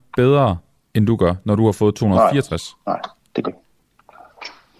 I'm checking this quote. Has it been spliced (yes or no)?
yes